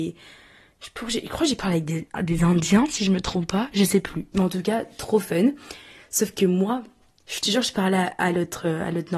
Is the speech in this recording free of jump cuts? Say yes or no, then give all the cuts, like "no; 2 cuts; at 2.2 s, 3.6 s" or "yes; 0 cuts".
yes; 0 cuts